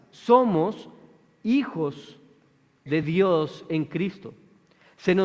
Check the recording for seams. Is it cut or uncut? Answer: uncut